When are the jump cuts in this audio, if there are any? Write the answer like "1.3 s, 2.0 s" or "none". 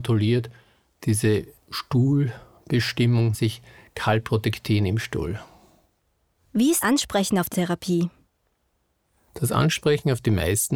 3.3 s, 6.8 s, 7.5 s